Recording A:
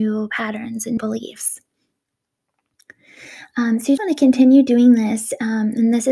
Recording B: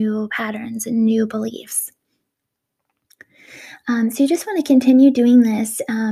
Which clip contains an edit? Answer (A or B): A